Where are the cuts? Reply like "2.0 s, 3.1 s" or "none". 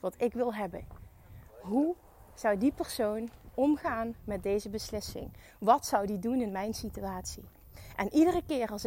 1.5 s